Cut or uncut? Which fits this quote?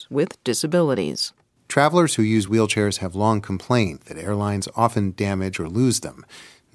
uncut